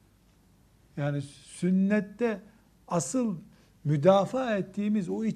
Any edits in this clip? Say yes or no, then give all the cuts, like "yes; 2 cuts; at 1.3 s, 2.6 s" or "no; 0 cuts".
no; 0 cuts